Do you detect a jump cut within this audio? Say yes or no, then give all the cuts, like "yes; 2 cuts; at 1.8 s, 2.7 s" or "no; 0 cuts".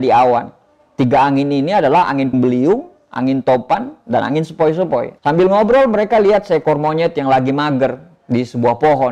yes; 2 cuts; at 2.3 s, 5.2 s